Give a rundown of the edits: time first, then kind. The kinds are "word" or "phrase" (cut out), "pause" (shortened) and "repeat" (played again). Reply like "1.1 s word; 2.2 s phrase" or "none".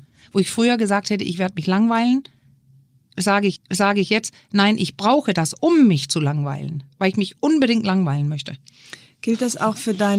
3.6 s repeat